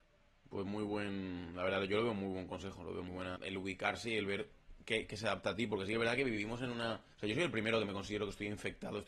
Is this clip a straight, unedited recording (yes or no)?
no